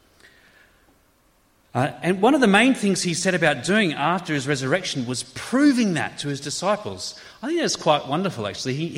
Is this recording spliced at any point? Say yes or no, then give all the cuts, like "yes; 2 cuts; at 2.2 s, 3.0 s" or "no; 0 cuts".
no; 0 cuts